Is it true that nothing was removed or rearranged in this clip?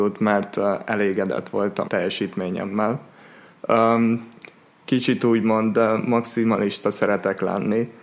no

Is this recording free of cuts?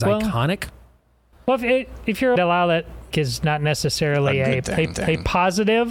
no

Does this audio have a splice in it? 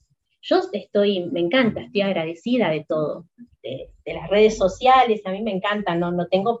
no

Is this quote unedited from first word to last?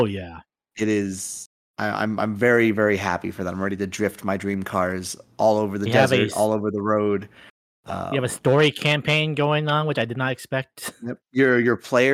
yes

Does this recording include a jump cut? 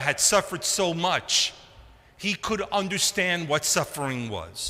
no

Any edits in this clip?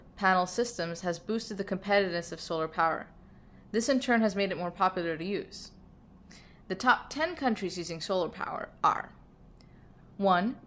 no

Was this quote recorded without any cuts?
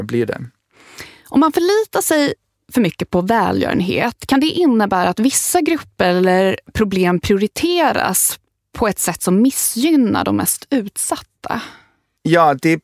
yes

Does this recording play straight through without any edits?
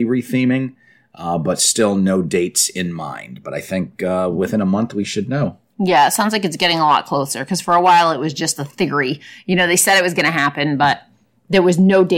yes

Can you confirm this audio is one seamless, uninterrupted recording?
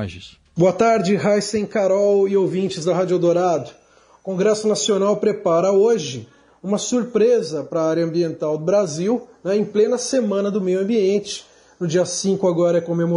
yes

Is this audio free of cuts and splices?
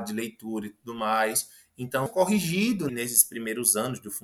no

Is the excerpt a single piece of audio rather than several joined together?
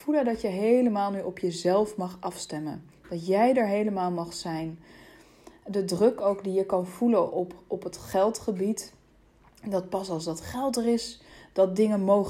yes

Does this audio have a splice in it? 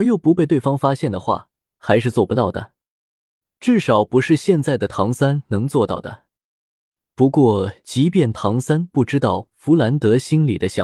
no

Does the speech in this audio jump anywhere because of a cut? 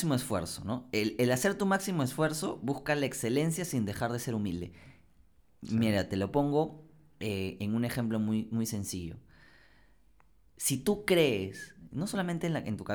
no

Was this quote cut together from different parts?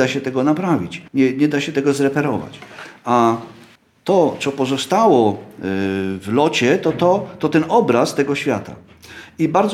yes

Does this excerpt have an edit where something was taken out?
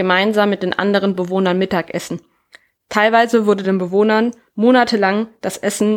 no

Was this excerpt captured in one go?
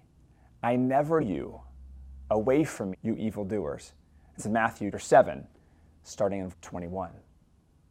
no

